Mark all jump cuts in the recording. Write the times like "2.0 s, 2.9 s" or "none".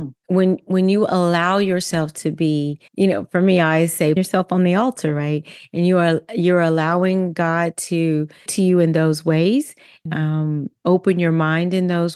2.9 s, 4.2 s, 8.5 s, 10.1 s